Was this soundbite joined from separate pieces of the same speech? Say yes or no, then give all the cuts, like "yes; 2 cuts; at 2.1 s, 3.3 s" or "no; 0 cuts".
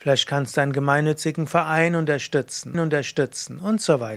yes; 1 cut; at 2.7 s